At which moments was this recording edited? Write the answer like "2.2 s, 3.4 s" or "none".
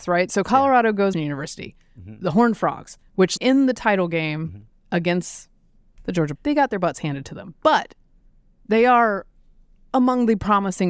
1.1 s, 3.4 s, 6.4 s